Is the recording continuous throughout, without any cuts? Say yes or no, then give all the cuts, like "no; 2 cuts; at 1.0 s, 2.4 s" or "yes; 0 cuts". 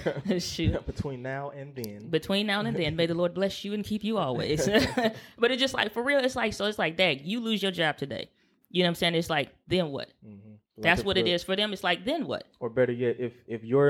yes; 0 cuts